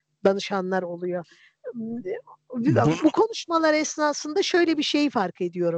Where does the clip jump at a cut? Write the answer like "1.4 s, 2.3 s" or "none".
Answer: none